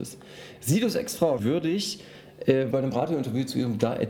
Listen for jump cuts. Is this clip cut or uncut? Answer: cut